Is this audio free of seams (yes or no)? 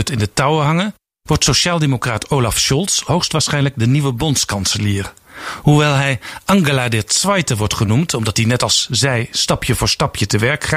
yes